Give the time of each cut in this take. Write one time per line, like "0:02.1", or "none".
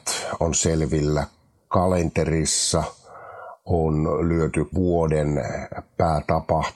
0:04.7